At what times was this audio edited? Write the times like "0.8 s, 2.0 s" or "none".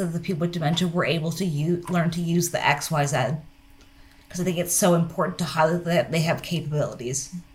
none

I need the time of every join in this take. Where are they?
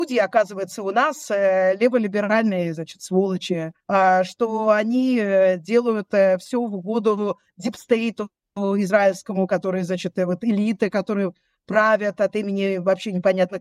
3.8 s

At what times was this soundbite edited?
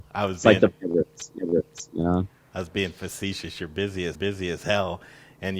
1.4 s, 4.1 s

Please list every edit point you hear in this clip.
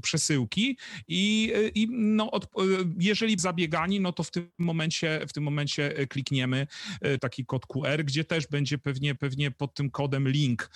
3.4 s, 7.2 s, 9.2 s

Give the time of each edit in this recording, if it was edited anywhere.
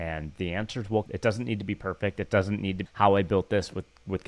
1.1 s, 2.9 s

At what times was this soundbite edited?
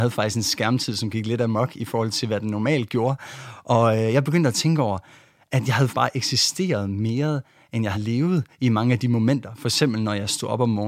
5.9 s, 7.9 s

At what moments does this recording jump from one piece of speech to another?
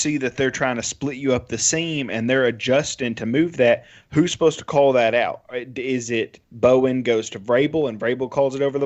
6.4 s

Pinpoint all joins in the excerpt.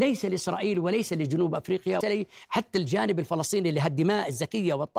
2.0 s

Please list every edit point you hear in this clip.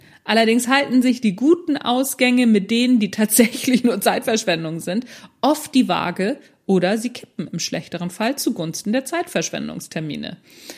none

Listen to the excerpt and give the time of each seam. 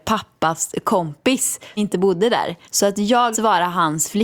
1.8 s, 2.6 s, 3.3 s

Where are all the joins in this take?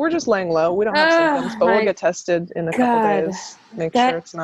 none

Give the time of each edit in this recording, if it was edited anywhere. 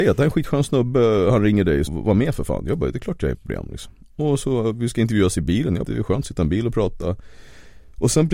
1.9 s, 3.3 s, 5.8 s

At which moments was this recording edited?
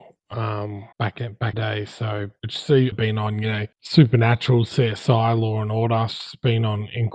0.9 s, 1.5 s, 2.9 s, 3.7 s

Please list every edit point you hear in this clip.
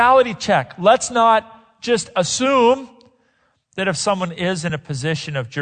none

